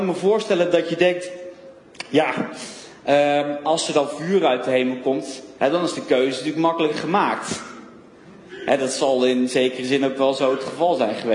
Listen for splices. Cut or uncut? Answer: cut